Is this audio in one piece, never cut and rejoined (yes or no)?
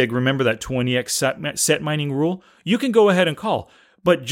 yes